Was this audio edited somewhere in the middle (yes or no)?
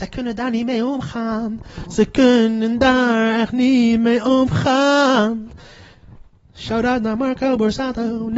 no